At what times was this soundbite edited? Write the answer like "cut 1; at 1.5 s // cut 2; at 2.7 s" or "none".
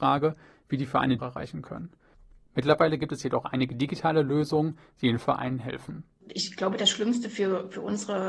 cut 1; at 1.2 s